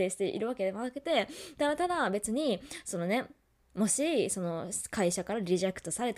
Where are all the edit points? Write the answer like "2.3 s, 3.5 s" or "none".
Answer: none